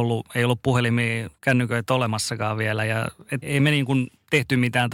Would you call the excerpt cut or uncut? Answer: cut